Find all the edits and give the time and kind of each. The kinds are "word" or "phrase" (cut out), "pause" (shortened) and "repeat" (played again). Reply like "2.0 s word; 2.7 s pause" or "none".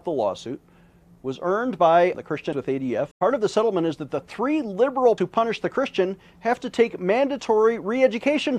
2.1 s phrase; 2.5 s word; 3.1 s pause; 5.2 s word